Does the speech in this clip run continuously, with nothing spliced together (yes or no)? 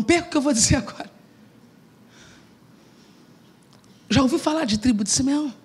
yes